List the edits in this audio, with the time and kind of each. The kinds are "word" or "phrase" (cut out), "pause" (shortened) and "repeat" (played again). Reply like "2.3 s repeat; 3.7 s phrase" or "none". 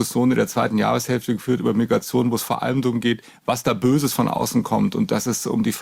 none